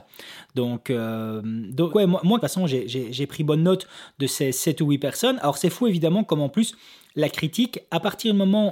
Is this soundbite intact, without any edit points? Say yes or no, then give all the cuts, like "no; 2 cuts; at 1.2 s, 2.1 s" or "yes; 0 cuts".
no; 2 cuts; at 1.9 s, 2.4 s